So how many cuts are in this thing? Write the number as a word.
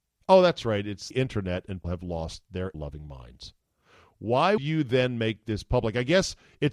four